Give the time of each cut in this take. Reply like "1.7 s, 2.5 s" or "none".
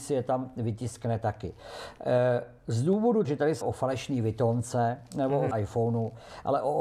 3.2 s, 3.6 s, 5.5 s